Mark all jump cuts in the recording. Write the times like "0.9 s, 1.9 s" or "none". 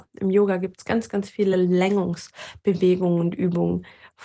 none